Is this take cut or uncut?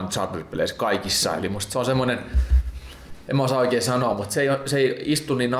uncut